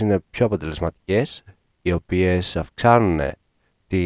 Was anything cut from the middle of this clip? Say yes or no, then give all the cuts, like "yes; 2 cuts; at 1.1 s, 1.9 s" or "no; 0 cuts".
no; 0 cuts